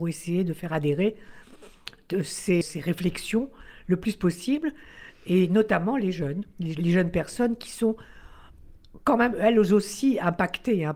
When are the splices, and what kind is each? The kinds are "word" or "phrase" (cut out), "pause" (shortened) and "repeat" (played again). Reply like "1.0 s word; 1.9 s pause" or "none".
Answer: 2.6 s word